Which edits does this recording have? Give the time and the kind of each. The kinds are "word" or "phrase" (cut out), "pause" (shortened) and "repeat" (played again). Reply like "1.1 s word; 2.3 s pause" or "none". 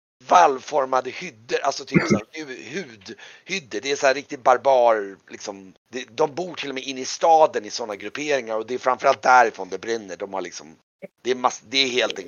5.8 s pause